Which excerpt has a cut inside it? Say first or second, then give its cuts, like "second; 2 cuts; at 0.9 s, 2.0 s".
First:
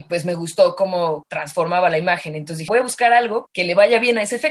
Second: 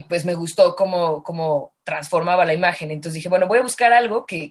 first; 3 cuts; at 1.2 s, 2.7 s, 3.5 s